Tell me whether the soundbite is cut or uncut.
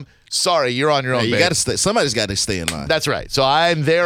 uncut